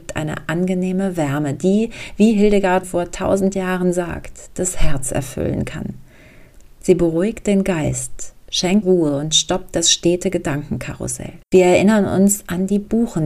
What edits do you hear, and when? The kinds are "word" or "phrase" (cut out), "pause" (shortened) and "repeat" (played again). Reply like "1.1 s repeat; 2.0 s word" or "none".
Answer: 2.8 s word; 8.8 s word; 11.4 s pause